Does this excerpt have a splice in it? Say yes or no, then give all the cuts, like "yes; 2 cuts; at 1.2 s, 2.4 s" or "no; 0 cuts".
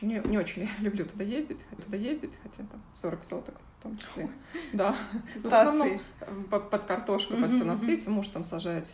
yes; 2 cuts; at 1.8 s, 5.5 s